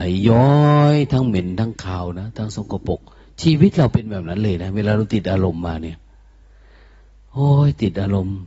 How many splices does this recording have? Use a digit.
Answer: 0